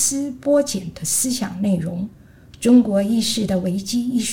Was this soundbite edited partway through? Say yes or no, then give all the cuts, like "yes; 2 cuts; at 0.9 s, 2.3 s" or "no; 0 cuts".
no; 0 cuts